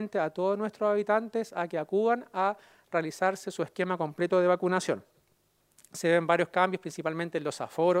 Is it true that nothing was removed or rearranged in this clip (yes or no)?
yes